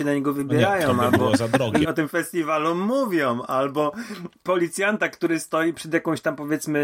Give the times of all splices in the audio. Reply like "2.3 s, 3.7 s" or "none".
1.8 s